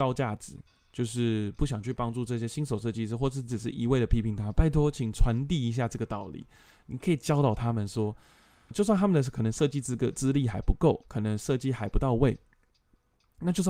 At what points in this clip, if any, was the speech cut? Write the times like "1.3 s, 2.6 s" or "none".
8.7 s